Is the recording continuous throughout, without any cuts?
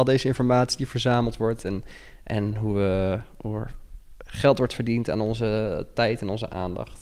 yes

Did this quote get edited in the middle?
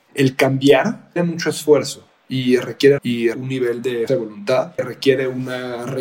yes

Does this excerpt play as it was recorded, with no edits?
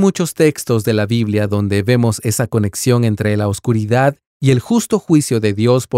yes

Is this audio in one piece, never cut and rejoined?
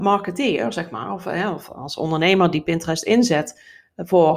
yes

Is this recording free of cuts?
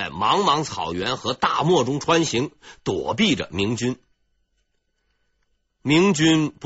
yes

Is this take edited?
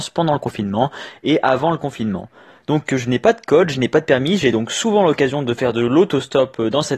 no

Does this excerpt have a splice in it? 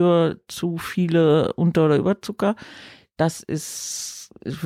no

